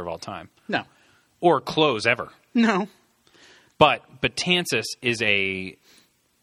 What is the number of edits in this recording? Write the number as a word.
zero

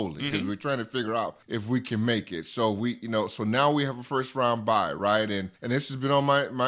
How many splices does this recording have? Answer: two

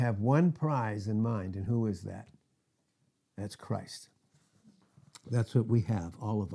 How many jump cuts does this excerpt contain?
zero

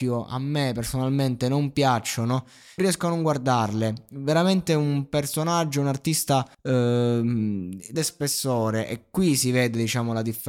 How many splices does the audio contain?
three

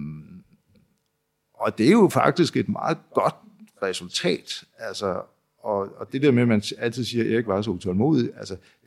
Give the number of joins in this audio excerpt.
zero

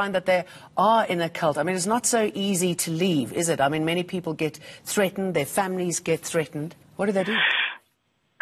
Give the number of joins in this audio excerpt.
one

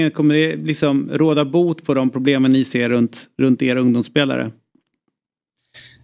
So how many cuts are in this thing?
zero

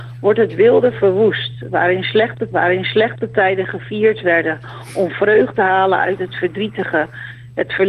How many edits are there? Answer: two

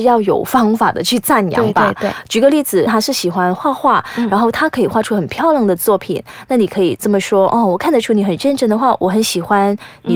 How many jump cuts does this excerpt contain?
one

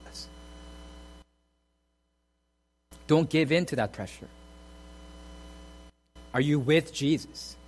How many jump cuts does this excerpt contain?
zero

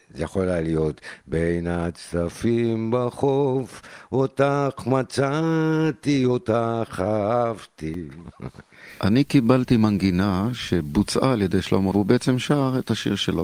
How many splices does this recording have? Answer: one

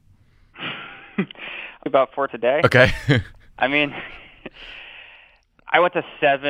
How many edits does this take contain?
two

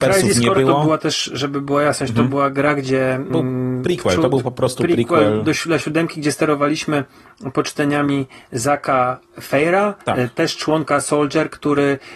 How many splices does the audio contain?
two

